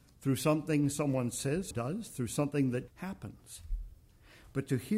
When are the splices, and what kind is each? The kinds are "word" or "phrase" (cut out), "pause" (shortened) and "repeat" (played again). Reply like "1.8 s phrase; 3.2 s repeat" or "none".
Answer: 1.7 s word; 2.9 s word